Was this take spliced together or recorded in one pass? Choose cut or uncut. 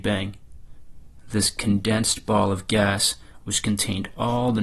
uncut